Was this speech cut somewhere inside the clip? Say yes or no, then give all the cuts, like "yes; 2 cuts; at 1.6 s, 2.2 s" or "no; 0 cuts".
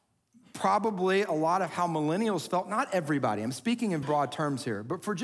yes; 1 cut; at 4.0 s